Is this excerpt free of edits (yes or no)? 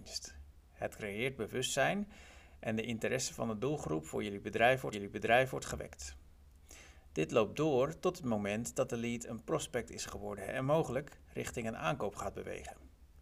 no